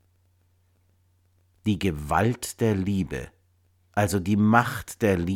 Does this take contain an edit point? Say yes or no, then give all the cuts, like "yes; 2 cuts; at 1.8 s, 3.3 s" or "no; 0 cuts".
no; 0 cuts